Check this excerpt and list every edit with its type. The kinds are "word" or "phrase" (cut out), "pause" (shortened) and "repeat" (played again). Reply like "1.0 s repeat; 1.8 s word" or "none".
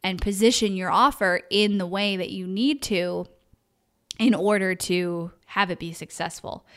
5.4 s pause